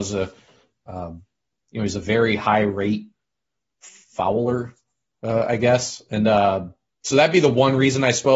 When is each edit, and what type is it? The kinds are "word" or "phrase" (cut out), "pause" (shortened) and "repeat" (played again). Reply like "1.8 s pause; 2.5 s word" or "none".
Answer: none